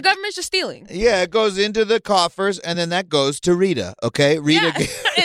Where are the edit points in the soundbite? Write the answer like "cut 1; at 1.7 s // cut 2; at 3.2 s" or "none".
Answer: none